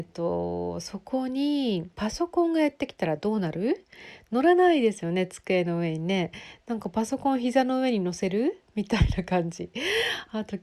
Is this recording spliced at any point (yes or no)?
yes